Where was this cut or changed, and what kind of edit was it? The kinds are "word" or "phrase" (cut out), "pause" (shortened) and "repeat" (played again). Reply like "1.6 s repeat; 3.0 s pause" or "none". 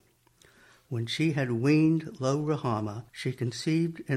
3.1 s pause

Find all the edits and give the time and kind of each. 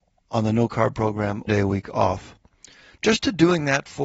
1.5 s word

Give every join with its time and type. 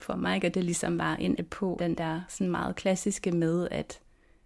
1.4 s phrase; 1.8 s word

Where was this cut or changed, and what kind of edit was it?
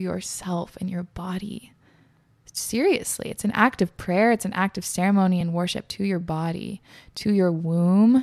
none

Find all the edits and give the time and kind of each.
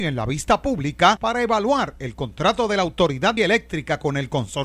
3.4 s word

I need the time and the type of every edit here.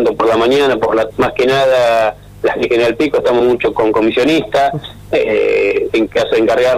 1.1 s word; 2.6 s word; 3.4 s word; 3.7 s word

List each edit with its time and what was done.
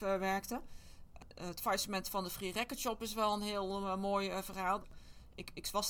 none

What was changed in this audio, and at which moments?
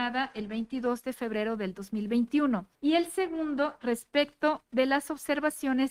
2.7 s pause

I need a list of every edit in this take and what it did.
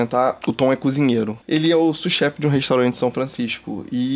none

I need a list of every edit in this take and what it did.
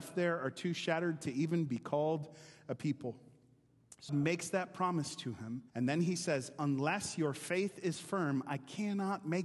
4.1 s word; 5.7 s pause

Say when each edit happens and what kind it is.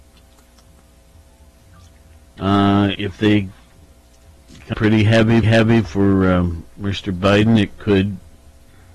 2.9 s phrase; 4.7 s word; 5.4 s repeat

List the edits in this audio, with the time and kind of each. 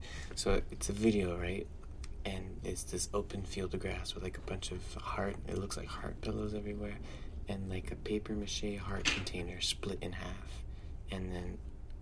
none

